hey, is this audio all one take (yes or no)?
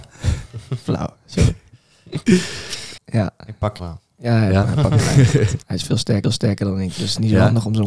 no